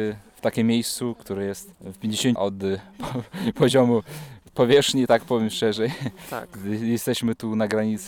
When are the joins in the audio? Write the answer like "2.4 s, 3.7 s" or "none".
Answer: 2.4 s